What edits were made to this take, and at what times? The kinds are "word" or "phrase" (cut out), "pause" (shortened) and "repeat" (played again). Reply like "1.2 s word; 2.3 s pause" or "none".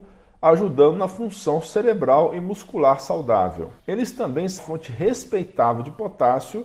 3.8 s pause; 4.6 s word